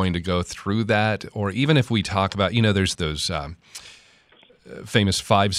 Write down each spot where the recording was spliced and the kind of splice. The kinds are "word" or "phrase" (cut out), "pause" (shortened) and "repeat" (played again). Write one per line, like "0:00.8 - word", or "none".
0:02.9 - word